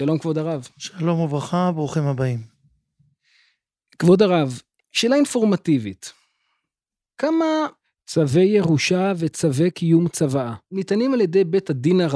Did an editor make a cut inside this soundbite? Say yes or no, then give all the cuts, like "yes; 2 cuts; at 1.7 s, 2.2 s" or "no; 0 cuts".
no; 0 cuts